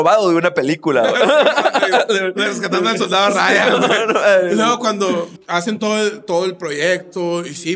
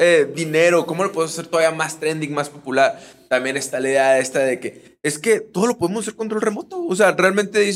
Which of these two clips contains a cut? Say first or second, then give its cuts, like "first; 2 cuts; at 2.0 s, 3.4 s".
first; 1 cut; at 5.4 s